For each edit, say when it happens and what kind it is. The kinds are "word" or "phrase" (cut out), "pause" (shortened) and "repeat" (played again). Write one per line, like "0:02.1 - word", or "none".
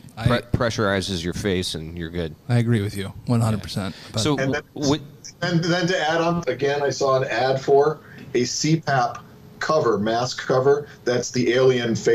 0:06.4 - word